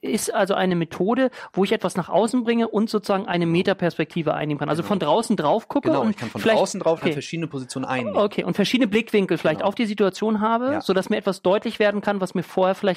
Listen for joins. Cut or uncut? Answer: cut